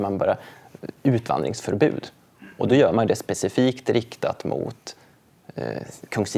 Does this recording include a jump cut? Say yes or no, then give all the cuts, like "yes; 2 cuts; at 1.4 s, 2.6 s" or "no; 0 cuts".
no; 0 cuts